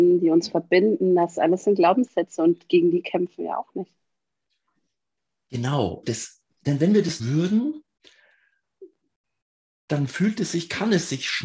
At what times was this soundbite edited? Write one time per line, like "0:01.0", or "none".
0:06.0
0:06.5
0:07.2